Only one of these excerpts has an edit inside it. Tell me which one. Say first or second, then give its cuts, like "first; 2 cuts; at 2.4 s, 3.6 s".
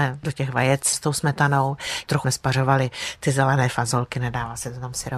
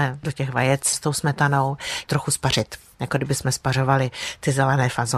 first; 1 cut; at 2.2 s